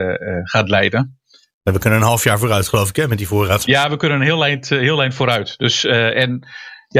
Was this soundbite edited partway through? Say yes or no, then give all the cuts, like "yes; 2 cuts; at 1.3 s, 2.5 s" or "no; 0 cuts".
no; 0 cuts